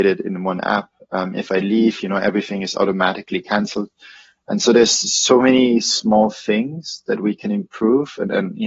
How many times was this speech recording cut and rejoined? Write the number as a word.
zero